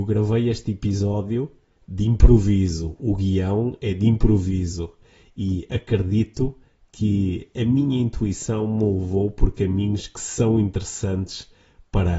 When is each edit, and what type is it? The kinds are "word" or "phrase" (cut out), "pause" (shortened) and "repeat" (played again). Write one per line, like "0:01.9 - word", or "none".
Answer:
none

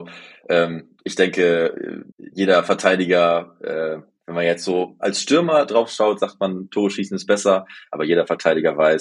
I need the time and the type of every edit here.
0:02.1 - pause

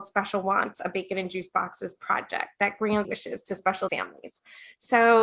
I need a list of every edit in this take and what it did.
0:03.0 - word
0:03.9 - word

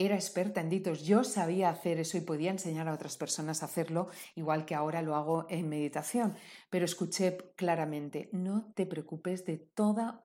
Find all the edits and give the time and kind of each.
none

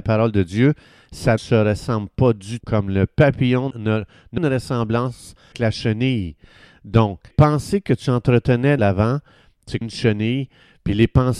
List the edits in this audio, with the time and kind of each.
0:01.4 - word
0:02.6 - word
0:03.7 - word
0:04.4 - word
0:05.5 - word
0:07.3 - word
0:08.8 - word
0:09.8 - word

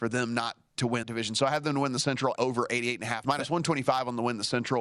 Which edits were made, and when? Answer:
0:01.0 - word
0:02.4 - word
0:03.2 - word

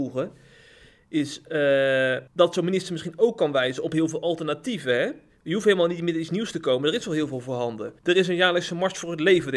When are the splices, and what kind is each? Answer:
0:02.3 - pause
0:08.0 - pause

